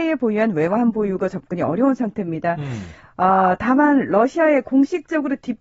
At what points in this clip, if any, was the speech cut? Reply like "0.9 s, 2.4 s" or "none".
none